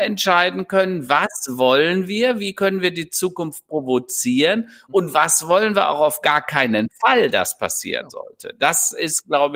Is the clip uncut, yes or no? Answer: yes